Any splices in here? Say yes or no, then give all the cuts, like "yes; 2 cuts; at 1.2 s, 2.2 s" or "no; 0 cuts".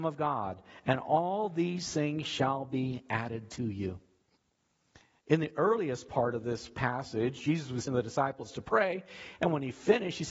yes; 1 cut; at 7.9 s